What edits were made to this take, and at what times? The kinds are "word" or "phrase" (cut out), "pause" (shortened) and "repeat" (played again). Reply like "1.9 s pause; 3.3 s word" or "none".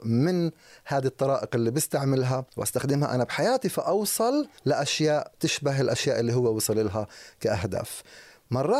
2.5 s pause; 4.6 s pause